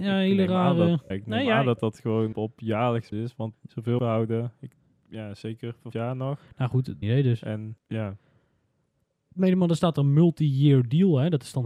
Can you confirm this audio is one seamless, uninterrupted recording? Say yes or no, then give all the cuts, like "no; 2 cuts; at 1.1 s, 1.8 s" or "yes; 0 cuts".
no; 8 cuts; at 1.1 s, 2.3 s, 3.1 s, 3.5 s, 4.0 s, 5.9 s, 7.0 s, 7.8 s